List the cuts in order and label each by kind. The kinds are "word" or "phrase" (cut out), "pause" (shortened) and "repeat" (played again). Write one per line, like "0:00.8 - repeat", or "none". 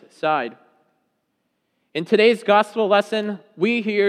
none